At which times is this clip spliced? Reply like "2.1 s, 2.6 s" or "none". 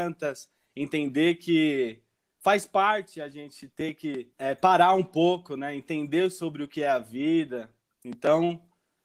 4.3 s